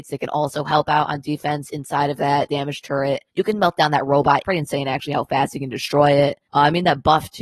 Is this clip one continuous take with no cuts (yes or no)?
no